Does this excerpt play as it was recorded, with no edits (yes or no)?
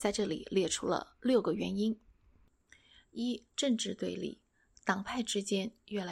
no